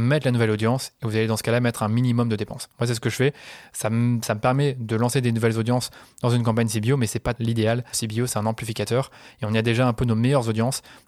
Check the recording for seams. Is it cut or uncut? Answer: cut